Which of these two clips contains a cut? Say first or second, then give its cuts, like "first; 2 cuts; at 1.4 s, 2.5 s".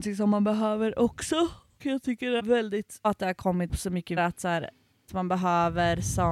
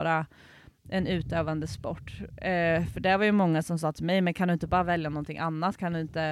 first; 6 cuts; at 1.8 s, 2.4 s, 3.0 s, 3.7 s, 4.2 s, 5.1 s